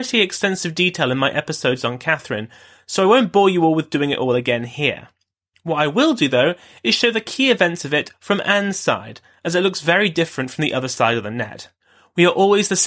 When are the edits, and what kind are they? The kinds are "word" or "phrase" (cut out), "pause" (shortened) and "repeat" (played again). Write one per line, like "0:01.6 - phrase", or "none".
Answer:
none